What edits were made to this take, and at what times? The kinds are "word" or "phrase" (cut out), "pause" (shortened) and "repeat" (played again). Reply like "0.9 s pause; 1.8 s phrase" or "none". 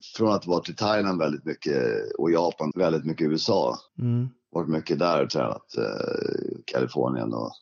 2.7 s phrase; 3.9 s pause